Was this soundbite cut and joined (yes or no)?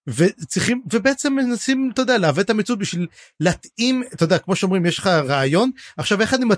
no